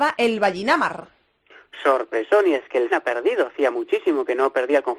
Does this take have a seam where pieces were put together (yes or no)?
yes